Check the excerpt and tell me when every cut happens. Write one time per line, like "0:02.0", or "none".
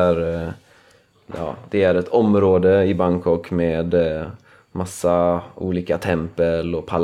none